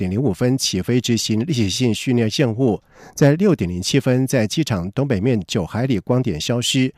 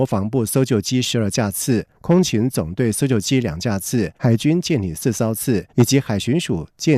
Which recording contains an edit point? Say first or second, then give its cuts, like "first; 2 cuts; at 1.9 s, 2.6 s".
second; 3 cuts; at 2.0 s, 4.2 s, 5.7 s